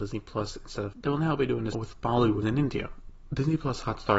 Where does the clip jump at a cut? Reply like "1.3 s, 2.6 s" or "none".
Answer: 0.9 s, 1.7 s, 2.4 s